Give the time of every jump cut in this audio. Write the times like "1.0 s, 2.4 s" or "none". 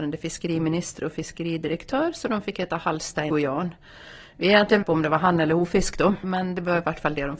3.3 s, 4.8 s, 6.2 s